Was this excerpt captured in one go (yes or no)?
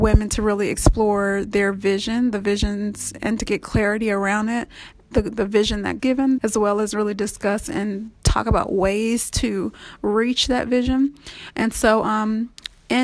no